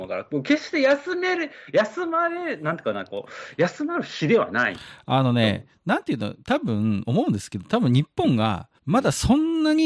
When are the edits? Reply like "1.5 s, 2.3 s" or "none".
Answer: 8.8 s